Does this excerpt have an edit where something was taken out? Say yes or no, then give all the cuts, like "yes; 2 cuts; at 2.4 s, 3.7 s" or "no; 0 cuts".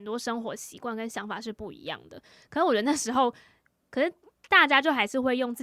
no; 0 cuts